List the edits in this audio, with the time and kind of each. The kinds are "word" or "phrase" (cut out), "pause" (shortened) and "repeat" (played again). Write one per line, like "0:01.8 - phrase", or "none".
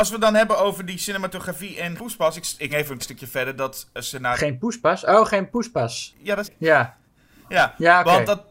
0:02.0 - word
0:02.7 - word
0:03.0 - word
0:06.4 - word